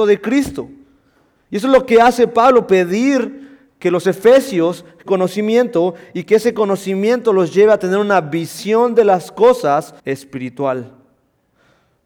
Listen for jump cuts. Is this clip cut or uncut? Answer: cut